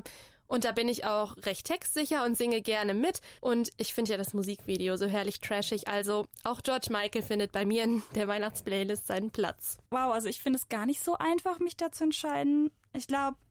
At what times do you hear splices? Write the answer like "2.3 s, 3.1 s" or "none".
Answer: 3.4 s, 9.9 s